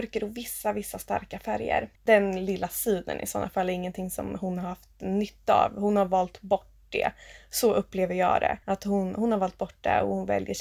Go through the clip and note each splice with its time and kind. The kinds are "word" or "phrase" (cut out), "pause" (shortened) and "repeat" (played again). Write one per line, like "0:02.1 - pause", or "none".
0:01.9 - pause
0:08.6 - pause